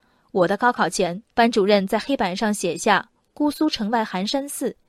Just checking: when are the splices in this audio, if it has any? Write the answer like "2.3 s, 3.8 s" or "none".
1.3 s